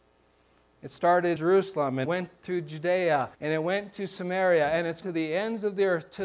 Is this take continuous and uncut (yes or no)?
no